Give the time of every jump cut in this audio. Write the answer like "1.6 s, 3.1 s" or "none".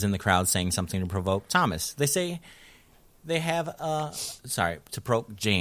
4.4 s